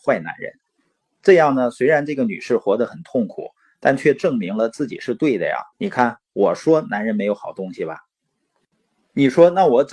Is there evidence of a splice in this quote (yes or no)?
yes